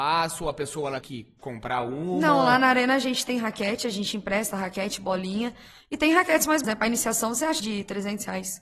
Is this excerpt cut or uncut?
cut